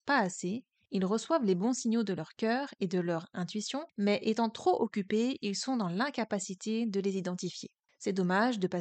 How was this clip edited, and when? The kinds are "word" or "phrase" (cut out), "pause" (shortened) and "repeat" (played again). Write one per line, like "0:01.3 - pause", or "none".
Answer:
0:03.9 - pause
0:07.9 - pause